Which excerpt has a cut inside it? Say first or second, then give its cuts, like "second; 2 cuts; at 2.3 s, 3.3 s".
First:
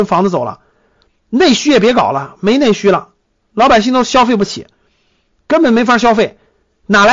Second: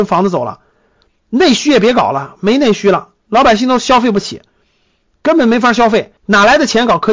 second; 2 cuts; at 3.2 s, 6.2 s